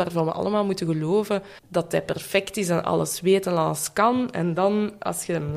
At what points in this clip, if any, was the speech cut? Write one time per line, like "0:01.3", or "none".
0:01.6